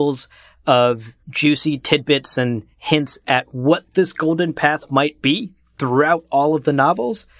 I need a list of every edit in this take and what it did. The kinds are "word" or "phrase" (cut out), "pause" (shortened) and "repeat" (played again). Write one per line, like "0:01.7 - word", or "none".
0:01.2 - pause